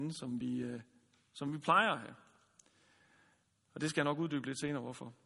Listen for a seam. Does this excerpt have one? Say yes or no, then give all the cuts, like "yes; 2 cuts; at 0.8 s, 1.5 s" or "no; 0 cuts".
no; 0 cuts